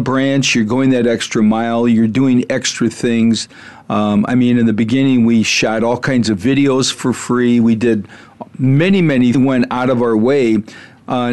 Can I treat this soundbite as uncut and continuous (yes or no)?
no